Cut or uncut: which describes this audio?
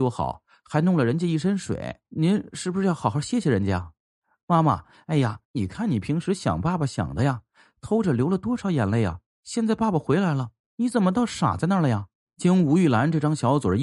cut